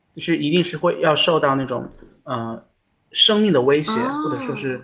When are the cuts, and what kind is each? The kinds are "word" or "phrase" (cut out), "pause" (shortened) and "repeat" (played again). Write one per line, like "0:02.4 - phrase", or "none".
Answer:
none